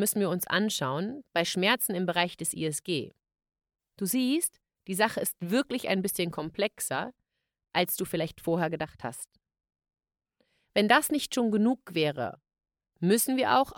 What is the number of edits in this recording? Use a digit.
0